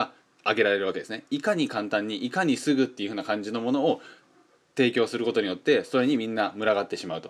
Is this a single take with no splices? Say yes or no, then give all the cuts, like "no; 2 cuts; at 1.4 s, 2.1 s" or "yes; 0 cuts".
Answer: yes; 0 cuts